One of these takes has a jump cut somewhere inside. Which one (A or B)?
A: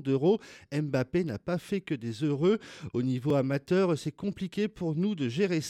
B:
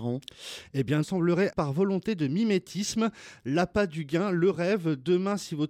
B